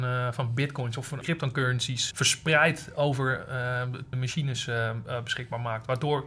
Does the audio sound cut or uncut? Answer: cut